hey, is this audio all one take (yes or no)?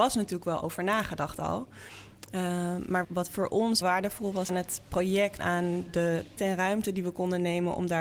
no